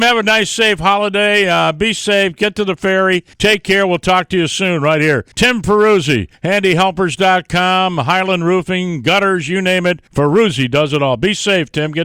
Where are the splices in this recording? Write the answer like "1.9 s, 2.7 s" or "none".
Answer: 3.3 s, 5.3 s, 6.3 s, 10.1 s